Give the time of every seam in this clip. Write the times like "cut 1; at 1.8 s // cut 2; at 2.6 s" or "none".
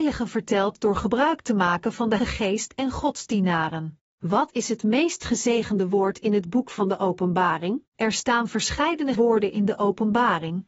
cut 1; at 2.2 s // cut 2; at 4.1 s // cut 3; at 7.9 s // cut 4; at 9.2 s